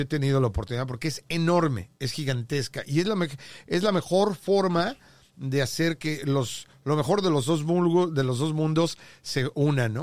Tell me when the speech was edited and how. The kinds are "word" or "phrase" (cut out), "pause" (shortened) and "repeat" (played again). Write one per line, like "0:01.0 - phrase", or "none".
none